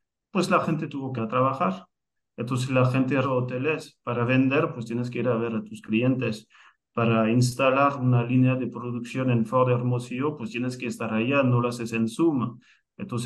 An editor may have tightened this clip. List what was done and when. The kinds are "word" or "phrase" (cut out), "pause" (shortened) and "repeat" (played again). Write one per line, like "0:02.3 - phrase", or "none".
0:01.2 - word
0:03.2 - word